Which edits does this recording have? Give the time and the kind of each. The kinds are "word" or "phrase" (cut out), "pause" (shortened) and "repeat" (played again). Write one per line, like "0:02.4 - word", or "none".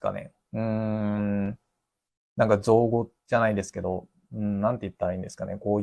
0:02.1 - pause
0:03.2 - pause